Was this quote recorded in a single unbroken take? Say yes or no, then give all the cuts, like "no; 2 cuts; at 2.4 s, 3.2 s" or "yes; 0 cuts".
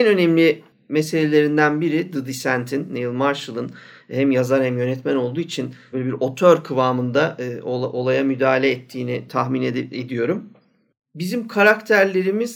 no; 1 cut; at 5.9 s